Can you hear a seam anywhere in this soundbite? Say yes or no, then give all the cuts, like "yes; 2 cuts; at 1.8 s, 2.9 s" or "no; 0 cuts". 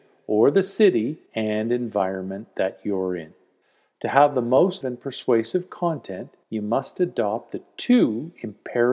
yes; 4 cuts; at 1.3 s, 3.6 s, 4.8 s, 6.4 s